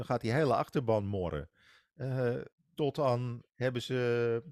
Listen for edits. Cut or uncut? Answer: cut